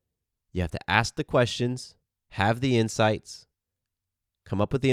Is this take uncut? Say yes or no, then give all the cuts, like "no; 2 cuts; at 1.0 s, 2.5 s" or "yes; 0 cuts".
no; 1 cut; at 2.1 s